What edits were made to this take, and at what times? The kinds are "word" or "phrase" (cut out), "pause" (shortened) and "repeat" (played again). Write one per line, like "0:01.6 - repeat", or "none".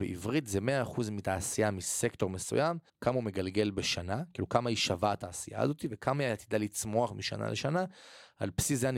0:02.9 - pause